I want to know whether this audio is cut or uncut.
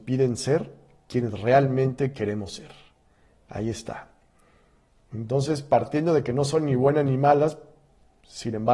uncut